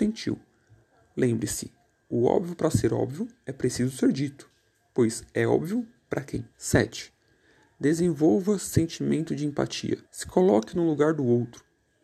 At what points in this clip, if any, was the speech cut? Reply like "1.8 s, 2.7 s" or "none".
6.5 s, 10.1 s